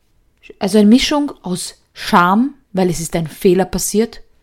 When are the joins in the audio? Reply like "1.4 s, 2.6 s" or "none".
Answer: 2.6 s